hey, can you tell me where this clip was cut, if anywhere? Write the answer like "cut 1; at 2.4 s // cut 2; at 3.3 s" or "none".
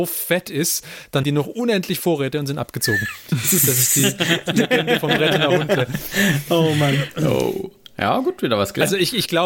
cut 1; at 1.2 s